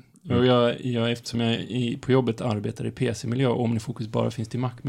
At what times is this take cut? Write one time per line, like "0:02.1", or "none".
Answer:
none

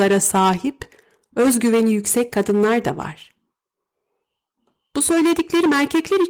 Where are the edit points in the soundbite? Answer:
none

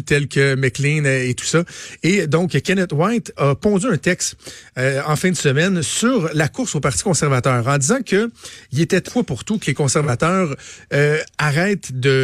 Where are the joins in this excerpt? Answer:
0:09.1

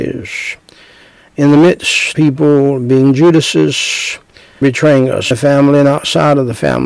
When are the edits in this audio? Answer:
0:02.1
0:04.6
0:05.3

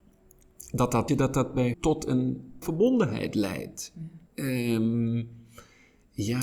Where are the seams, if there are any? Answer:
0:01.1
0:01.7
0:02.6
0:04.3

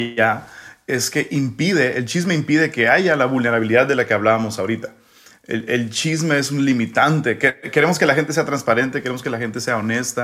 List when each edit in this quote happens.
none

